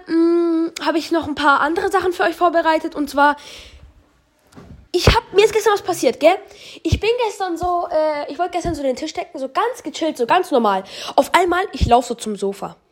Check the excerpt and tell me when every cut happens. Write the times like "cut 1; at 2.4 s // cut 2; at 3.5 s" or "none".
cut 1; at 4.9 s